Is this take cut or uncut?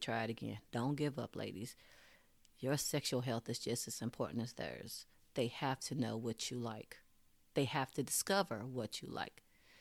uncut